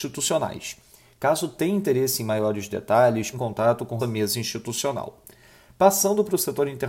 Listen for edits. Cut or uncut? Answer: cut